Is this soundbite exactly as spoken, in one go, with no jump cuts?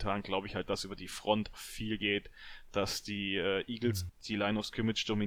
no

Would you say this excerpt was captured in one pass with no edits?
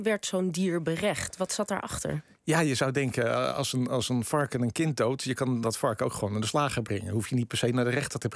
yes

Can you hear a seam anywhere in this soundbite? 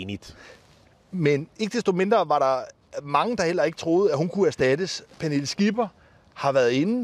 no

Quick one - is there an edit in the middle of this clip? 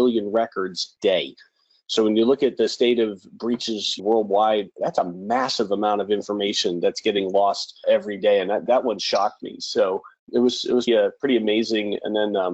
yes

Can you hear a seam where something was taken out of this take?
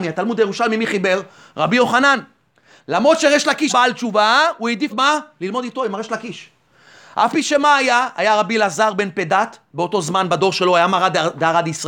yes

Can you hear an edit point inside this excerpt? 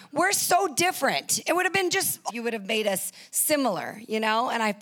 yes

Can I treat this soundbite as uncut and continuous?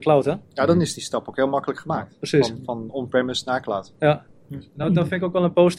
yes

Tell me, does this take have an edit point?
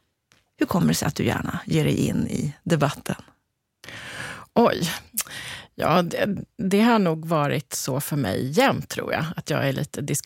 no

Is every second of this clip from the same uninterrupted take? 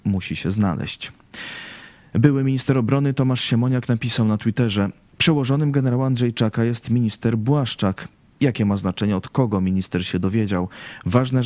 yes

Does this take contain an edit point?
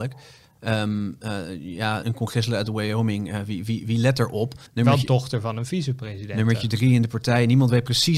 yes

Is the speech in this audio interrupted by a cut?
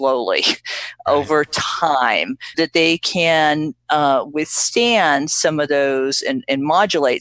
yes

